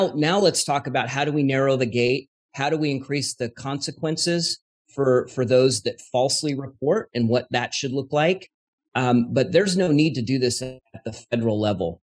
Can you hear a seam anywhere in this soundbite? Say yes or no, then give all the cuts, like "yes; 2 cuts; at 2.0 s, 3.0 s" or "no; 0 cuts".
no; 0 cuts